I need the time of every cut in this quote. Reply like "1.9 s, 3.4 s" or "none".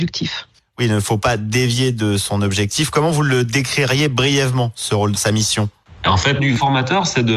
5.1 s, 6.4 s